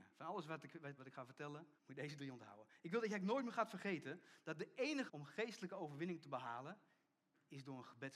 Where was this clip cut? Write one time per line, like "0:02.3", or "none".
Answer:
0:01.0
0:01.8
0:05.1